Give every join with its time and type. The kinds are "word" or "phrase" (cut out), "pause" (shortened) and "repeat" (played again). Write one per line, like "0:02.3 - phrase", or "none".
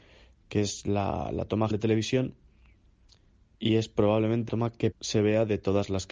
0:01.7 - word
0:04.5 - word
0:04.9 - word